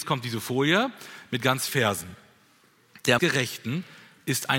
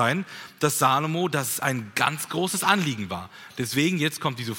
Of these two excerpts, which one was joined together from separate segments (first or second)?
first